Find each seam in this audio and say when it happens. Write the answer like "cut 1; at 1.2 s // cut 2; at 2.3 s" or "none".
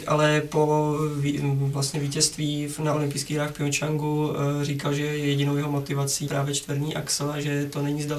cut 1; at 6.3 s